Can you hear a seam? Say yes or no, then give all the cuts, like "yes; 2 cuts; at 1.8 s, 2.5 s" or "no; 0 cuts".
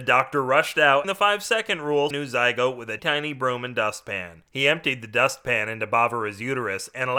yes; 3 cuts; at 1.0 s, 2.1 s, 3.0 s